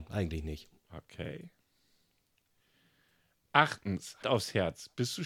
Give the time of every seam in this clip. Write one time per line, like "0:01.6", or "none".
0:04.2